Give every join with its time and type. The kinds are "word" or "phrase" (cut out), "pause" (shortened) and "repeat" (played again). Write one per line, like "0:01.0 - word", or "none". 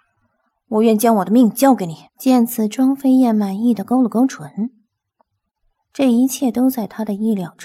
0:02.1 - pause